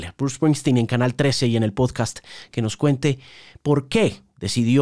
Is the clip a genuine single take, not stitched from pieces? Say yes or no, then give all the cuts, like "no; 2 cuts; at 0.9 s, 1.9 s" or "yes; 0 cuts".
yes; 0 cuts